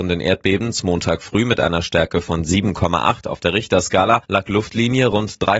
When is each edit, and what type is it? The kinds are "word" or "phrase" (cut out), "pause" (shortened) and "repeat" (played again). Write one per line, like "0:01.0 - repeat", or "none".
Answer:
0:04.2 - pause